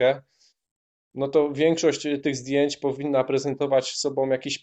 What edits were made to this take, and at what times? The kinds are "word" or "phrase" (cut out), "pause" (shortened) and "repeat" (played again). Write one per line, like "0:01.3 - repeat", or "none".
none